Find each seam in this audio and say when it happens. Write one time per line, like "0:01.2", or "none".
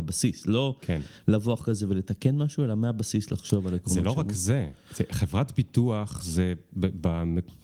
none